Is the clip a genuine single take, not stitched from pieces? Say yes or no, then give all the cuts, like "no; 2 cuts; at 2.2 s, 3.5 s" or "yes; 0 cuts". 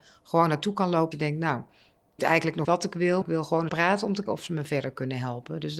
no; 6 cuts; at 1.1 s, 2.2 s, 2.6 s, 3.2 s, 3.7 s, 4.3 s